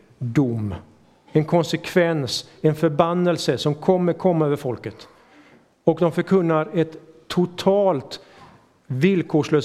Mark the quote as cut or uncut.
uncut